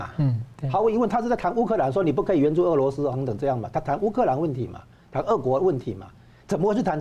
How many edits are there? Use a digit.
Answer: 1